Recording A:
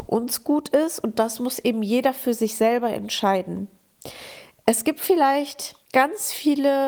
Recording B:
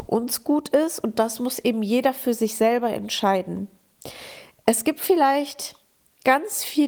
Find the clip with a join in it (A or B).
A